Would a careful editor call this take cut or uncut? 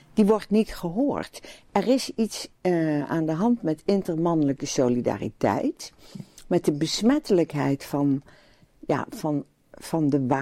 cut